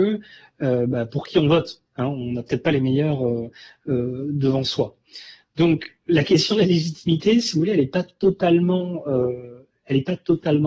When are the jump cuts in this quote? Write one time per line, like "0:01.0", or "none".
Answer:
none